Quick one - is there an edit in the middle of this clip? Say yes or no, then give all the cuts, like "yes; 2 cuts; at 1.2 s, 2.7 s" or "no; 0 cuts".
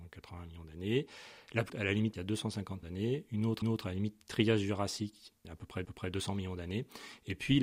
yes; 6 cuts; at 1.7 s, 2.1 s, 2.8 s, 3.6 s, 5.4 s, 5.8 s